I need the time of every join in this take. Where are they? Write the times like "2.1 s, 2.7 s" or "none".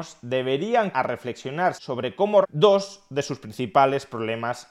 0.9 s, 1.8 s, 2.4 s